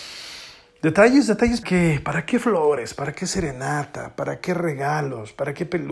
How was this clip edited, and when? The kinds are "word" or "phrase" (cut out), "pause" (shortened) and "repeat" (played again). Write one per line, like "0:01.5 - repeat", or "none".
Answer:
0:01.6 - word